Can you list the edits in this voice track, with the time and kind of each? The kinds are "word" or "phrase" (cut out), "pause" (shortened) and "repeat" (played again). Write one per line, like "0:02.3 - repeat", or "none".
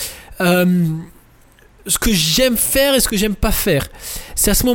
none